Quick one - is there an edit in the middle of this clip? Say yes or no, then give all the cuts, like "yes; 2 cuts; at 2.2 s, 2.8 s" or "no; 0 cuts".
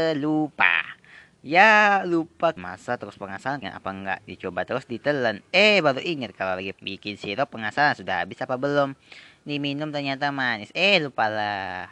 yes; 3 cuts; at 2.6 s, 3.6 s, 6.7 s